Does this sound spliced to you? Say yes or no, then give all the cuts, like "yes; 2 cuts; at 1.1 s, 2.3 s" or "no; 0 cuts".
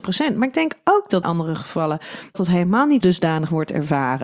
yes; 3 cuts; at 1.2 s, 2.3 s, 3.0 s